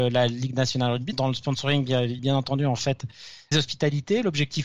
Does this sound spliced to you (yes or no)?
yes